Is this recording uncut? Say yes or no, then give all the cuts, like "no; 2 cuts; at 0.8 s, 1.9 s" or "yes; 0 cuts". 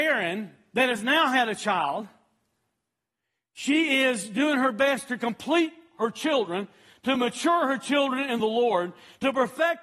yes; 0 cuts